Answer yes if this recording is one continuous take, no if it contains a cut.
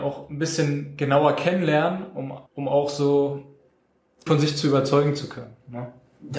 no